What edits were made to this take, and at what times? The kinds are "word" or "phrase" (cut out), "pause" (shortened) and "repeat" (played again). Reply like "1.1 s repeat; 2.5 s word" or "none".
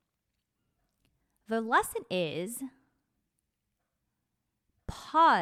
none